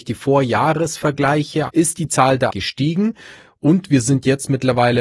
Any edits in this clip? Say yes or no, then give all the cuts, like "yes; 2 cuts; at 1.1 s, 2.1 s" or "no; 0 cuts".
yes; 2 cuts; at 1.7 s, 2.5 s